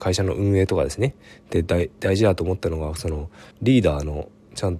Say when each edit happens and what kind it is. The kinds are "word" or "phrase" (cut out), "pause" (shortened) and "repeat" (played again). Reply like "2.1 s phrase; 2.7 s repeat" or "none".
3.5 s pause